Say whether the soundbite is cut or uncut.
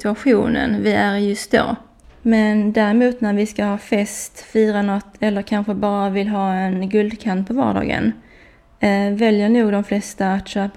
uncut